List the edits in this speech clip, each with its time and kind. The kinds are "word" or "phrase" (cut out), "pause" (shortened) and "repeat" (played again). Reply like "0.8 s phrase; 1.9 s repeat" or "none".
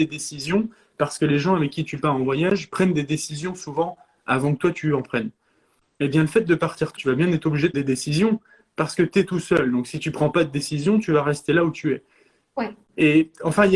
7.0 s word; 7.7 s word